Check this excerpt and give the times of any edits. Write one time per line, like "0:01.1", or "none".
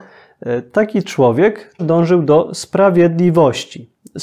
0:01.8